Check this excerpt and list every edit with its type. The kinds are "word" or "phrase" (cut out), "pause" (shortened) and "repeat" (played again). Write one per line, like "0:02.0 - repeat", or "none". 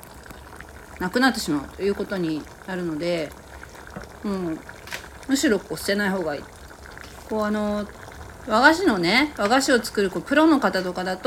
none

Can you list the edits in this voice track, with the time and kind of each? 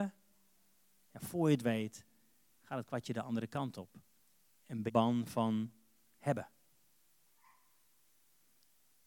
0:04.9 - phrase

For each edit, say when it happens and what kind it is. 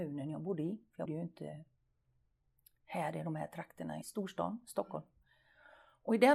0:01.1 - word
0:04.0 - phrase

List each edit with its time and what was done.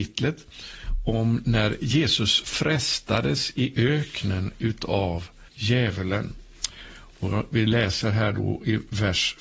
0:05.5 - pause

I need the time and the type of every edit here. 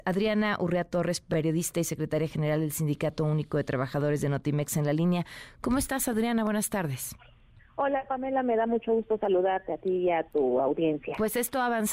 none

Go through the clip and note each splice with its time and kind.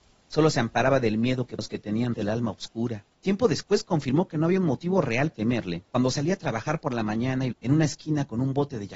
0:01.6 - word
0:02.1 - word
0:03.1 - pause
0:05.3 - word
0:05.9 - pause
0:07.5 - phrase

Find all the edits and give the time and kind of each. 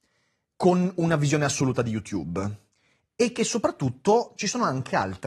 none

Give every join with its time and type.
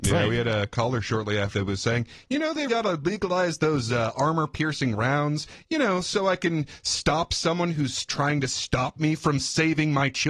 0:01.5 - word
0:02.7 - word

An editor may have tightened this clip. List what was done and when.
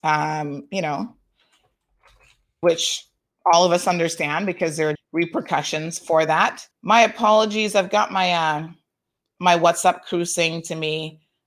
0:04.9 - word
0:06.7 - pause

